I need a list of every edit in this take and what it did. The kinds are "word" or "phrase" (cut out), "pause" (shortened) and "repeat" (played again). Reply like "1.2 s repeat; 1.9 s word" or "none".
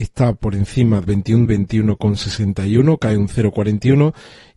1.0 s word; 1.4 s word